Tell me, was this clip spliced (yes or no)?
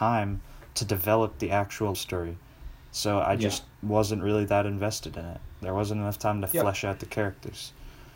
yes